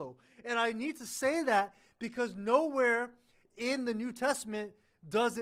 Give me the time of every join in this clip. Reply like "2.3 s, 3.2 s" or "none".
none